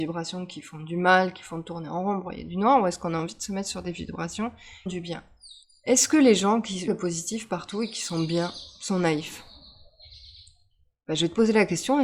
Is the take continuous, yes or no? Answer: no